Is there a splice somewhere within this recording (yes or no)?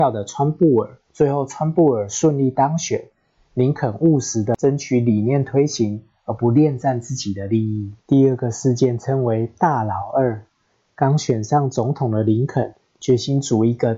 yes